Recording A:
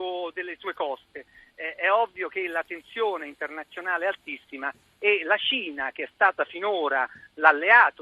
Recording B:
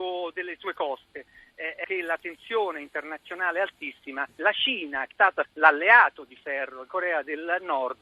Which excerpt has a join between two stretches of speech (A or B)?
B